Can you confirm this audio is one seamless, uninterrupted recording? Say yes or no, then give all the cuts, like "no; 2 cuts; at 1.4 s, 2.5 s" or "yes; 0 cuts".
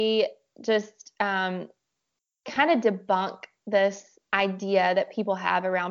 no; 1 cut; at 4.2 s